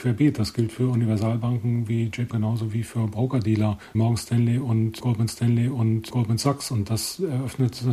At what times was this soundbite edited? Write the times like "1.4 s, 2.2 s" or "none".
2.3 s, 3.9 s, 5.3 s